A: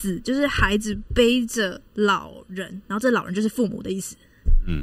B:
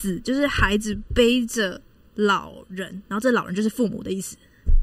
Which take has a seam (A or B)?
A